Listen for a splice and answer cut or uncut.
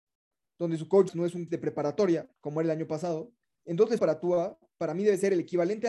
cut